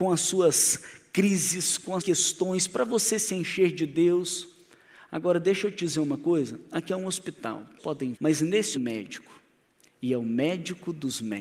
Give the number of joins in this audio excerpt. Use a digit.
4